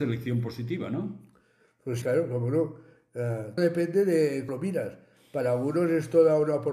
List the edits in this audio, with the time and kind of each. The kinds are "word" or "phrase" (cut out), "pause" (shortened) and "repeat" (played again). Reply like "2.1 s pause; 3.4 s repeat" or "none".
2.0 s word; 3.6 s word; 4.5 s word